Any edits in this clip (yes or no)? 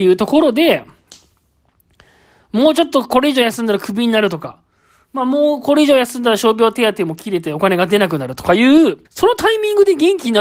yes